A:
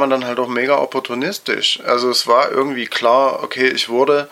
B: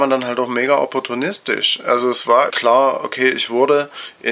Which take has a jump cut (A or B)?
B